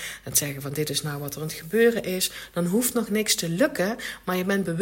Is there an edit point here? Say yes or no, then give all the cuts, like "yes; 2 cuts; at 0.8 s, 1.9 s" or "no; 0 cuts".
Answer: no; 0 cuts